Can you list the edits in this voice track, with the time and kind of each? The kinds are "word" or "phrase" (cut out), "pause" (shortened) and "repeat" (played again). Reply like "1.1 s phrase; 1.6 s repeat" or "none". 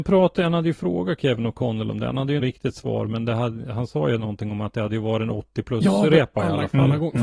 2.4 s phrase